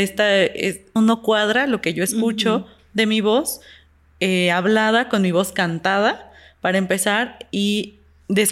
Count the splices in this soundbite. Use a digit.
1